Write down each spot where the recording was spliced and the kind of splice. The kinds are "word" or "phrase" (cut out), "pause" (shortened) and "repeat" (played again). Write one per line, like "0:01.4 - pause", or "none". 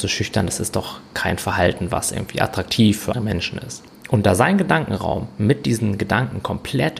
0:03.1 - word